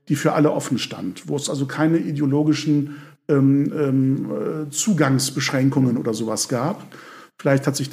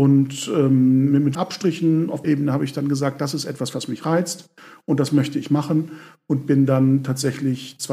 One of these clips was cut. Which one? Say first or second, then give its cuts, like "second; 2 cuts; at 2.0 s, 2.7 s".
second; 2 cuts; at 1.3 s, 2.2 s